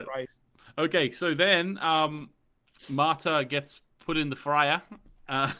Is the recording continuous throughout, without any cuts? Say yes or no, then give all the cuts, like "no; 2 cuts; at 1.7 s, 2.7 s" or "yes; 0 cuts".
yes; 0 cuts